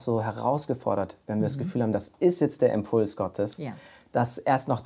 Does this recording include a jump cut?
no; 0 cuts

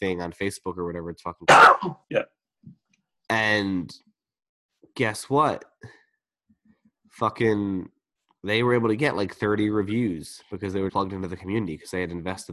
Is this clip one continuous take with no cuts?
no; 3 cuts; at 2.0 s, 8.2 s, 10.9 s

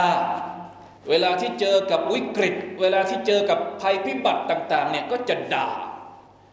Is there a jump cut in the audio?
yes; 1 cut; at 1.0 s

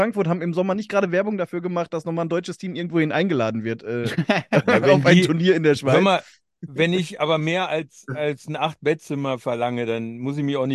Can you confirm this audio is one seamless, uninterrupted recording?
yes; 0 cuts

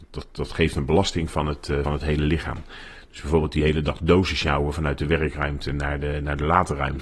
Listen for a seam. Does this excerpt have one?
yes; 1 cut; at 1.8 s

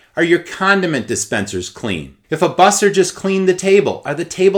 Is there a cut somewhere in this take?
yes; 1 cut; at 2.2 s

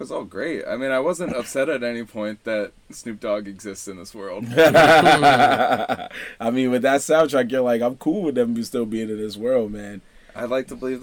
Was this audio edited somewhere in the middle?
yes; 1 cut; at 2.8 s

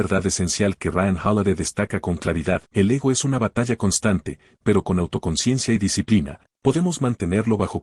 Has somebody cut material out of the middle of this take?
yes; 1 cut; at 2.7 s

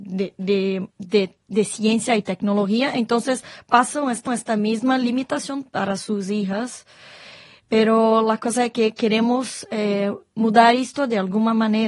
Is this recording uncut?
no; 2 cuts; at 0.9 s, 4.3 s

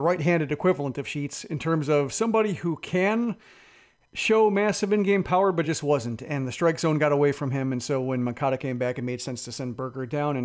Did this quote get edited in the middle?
no; 0 cuts

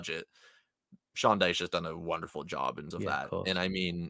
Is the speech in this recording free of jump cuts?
no; 1 cut; at 2.9 s

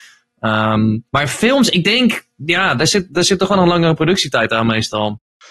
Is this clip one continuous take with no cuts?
no; 2 cuts; at 1.1 s, 2.3 s

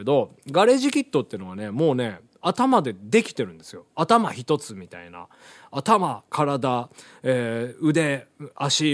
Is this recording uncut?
yes; 0 cuts

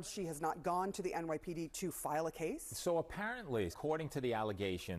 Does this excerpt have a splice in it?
yes; 2 cuts; at 1.7 s, 3.7 s

